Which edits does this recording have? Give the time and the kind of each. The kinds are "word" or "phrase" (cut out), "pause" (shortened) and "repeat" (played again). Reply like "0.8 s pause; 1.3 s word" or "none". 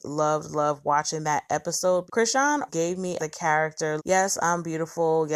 2.1 s word; 2.7 s word; 3.2 s word; 4.0 s word